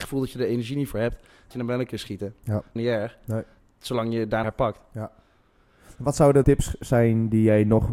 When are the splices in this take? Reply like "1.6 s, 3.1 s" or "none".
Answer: 1.5 s, 2.8 s, 4.4 s, 6.4 s